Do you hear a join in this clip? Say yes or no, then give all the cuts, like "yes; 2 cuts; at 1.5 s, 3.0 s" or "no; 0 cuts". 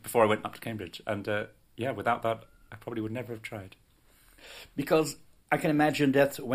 no; 0 cuts